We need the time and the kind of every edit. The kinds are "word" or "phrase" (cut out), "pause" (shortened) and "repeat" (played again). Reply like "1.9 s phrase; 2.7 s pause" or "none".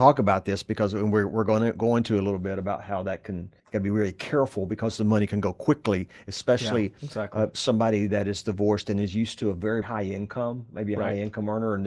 3.6 s pause; 9.8 s word